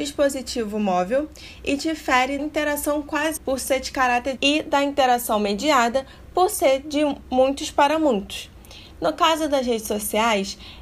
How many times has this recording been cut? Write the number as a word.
three